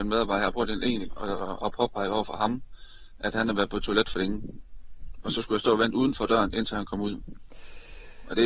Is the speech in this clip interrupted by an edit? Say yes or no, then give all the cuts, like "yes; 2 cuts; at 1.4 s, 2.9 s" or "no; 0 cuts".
yes; 1 cut; at 1.1 s